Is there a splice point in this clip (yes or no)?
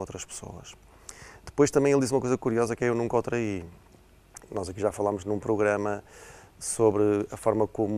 no